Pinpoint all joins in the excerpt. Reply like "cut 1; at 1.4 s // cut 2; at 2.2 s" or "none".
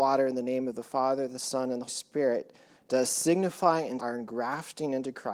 cut 1; at 1.9 s // cut 2; at 4.0 s